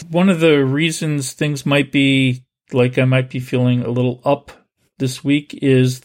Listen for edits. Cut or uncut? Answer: uncut